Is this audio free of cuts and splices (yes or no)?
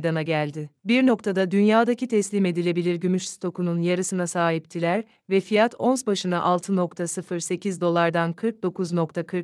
yes